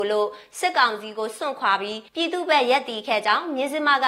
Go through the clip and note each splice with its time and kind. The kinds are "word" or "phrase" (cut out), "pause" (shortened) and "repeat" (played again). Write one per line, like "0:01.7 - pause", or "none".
0:02.1 - pause